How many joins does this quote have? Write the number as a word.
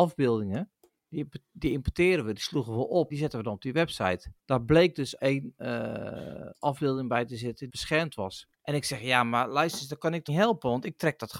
six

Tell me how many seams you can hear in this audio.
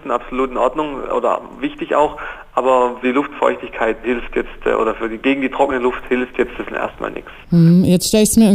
three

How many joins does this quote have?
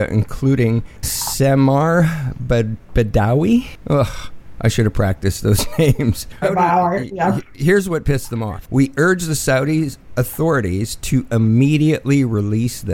two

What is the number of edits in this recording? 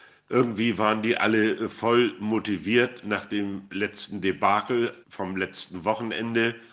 one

